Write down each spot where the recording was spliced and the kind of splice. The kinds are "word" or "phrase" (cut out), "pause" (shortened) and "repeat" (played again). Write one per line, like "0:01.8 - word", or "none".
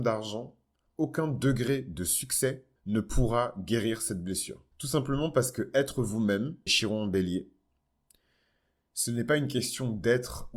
0:02.8 - pause
0:04.7 - pause
0:06.7 - word

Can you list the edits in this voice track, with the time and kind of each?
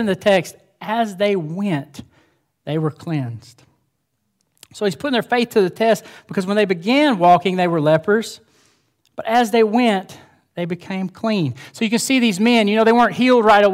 none

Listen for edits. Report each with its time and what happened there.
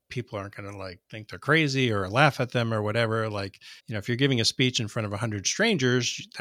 0:01.0 - pause
0:03.8 - pause

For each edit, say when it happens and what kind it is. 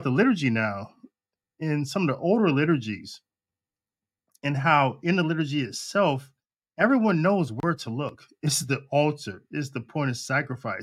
none

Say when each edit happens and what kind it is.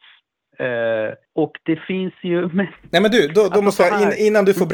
0:01.2 - pause

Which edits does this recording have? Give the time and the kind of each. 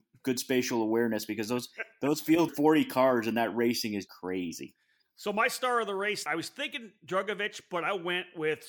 0:02.5 - word
0:04.1 - word
0:06.3 - word

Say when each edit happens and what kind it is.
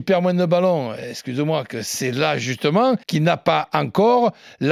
0:03.0 - pause

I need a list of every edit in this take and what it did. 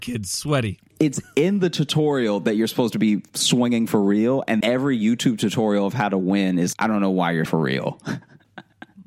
0:00.9 - word
0:04.6 - word
0:06.7 - word
0:07.5 - word

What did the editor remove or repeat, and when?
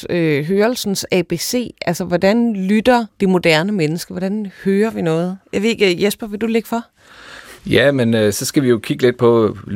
0:03.1 - pause
0:07.6 - pause

